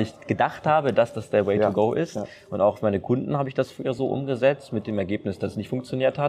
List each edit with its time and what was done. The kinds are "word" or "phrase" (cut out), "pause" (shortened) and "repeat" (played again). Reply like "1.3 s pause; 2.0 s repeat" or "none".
none